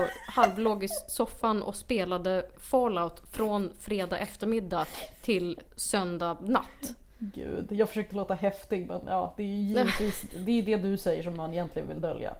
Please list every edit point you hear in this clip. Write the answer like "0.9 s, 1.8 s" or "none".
none